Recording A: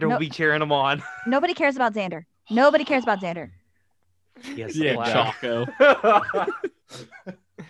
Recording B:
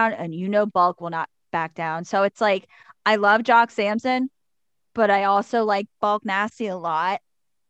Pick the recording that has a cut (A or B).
A